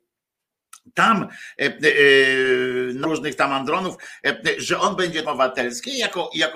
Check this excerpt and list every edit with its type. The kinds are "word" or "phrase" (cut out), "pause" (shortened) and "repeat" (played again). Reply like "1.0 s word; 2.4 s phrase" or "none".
3.0 s word; 5.2 s phrase